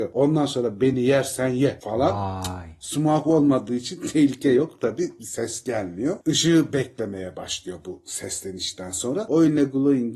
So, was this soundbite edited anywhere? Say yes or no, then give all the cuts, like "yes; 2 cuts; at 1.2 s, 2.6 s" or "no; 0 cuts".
no; 0 cuts